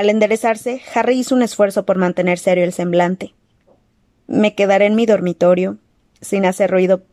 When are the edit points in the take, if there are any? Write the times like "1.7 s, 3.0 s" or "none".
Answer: none